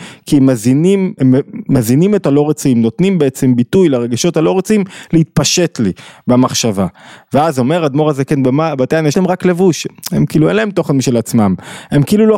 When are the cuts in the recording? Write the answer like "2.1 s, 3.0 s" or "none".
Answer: 1.2 s, 2.2 s, 9.1 s

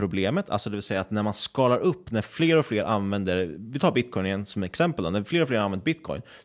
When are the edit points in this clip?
none

